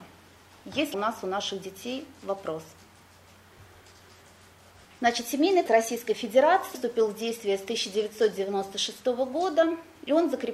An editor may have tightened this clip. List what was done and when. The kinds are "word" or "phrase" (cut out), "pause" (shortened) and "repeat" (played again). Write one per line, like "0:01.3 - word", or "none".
0:00.9 - word
0:05.7 - word
0:06.7 - word